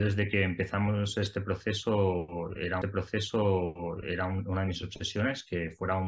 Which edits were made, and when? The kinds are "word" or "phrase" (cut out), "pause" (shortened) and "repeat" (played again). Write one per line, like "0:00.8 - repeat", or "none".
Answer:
0:02.8 - repeat